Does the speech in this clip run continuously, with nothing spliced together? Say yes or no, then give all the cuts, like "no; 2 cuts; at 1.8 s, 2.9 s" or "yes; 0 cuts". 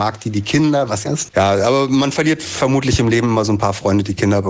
no; 1 cut; at 1.0 s